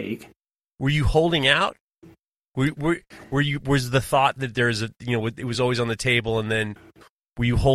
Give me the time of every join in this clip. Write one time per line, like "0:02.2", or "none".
none